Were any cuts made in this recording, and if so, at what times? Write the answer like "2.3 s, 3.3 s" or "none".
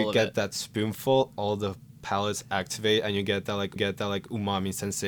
3.8 s